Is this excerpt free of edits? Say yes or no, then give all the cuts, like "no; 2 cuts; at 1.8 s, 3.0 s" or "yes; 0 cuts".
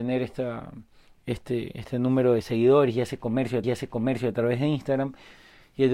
no; 1 cut; at 3.6 s